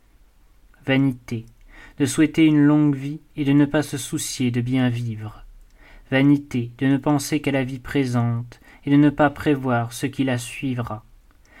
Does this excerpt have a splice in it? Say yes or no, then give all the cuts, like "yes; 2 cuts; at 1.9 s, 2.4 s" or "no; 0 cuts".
no; 0 cuts